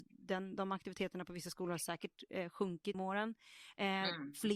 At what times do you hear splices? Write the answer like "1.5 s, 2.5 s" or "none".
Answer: 2.9 s

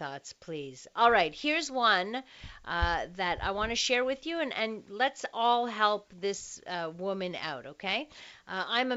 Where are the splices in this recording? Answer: none

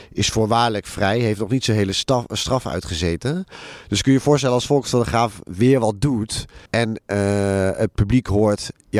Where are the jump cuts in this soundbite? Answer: 6.7 s

